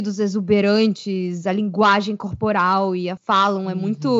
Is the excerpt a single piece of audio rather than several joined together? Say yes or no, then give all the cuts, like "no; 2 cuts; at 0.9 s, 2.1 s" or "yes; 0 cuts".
no; 1 cut; at 3.2 s